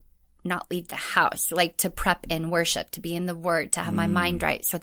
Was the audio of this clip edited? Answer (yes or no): no